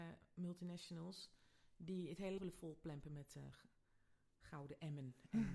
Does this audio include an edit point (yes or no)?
yes